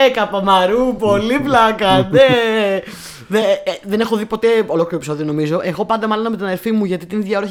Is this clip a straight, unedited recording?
yes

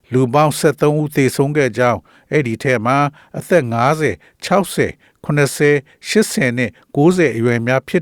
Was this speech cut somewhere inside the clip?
no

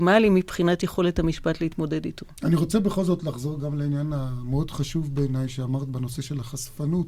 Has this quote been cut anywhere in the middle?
no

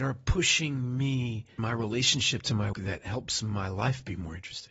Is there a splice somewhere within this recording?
yes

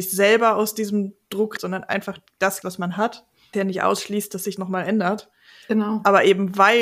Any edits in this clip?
yes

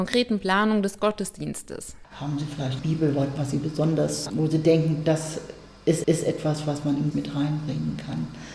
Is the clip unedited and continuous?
no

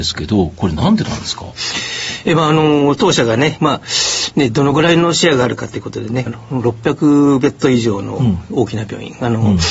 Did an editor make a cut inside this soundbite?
yes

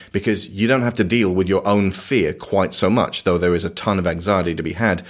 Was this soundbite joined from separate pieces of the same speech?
no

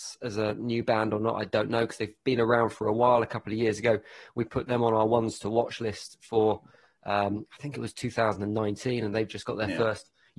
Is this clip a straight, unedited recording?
yes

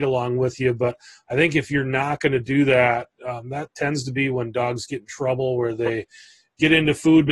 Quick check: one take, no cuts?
yes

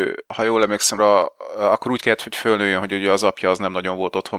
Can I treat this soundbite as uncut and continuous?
no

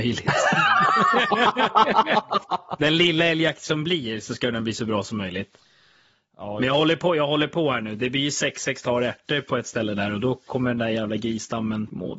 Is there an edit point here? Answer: no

